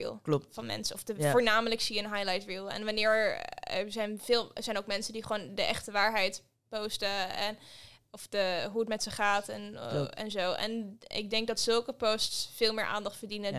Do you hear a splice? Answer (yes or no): no